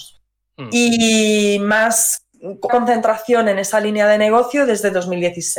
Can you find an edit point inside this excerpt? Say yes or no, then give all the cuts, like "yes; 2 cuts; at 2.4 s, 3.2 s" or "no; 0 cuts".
yes; 1 cut; at 2.7 s